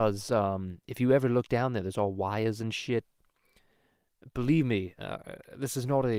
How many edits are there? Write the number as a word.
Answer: zero